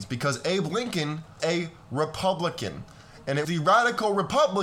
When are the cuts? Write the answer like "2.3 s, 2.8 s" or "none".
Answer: 1.4 s, 3.4 s